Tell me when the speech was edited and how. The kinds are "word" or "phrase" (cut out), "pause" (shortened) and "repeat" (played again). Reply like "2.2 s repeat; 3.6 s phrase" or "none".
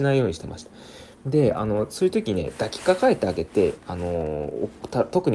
1.1 s pause